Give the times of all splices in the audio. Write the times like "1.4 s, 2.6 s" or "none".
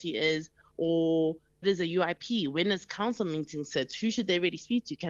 1.6 s